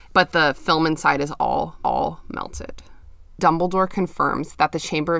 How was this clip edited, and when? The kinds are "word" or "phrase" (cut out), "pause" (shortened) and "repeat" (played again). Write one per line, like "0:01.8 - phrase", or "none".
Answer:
0:01.8 - repeat

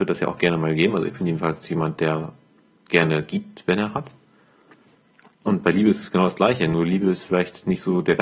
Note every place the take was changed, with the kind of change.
none

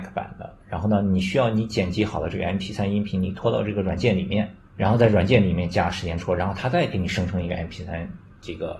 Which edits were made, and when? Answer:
0:04.7 - pause

